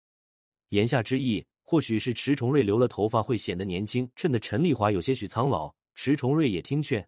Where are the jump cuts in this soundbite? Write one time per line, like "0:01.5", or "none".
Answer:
0:01.5
0:04.1
0:05.8